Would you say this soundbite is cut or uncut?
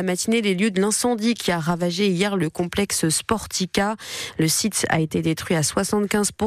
uncut